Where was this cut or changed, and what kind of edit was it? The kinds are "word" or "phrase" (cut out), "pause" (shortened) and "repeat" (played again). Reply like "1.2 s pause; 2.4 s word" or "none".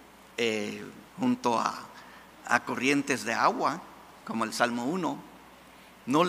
1.1 s pause; 2.3 s pause